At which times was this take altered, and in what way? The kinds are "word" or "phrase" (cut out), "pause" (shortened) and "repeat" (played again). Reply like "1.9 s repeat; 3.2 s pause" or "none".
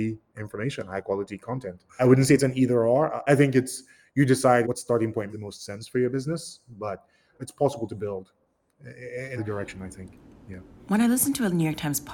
2.0 s word; 3.3 s word; 4.6 s word; 5.3 s word; 7.4 s word; 9.4 s word